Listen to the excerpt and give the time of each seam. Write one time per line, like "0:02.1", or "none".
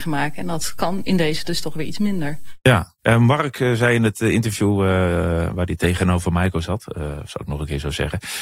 0:03.0